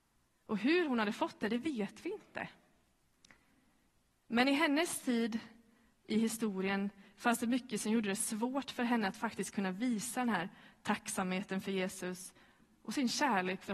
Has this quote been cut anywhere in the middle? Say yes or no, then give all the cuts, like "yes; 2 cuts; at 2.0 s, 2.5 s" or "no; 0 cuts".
no; 0 cuts